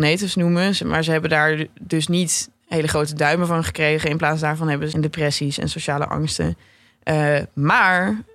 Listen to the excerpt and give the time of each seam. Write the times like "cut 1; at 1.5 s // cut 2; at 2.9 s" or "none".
cut 1; at 4.9 s